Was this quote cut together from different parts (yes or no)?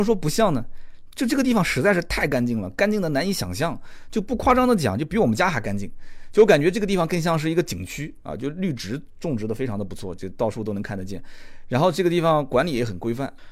no